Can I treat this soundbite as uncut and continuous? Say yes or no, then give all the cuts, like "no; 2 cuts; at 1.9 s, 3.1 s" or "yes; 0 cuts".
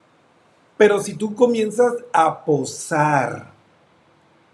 yes; 0 cuts